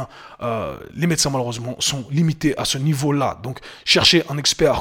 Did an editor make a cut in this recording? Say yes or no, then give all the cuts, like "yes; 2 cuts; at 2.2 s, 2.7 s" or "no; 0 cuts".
no; 0 cuts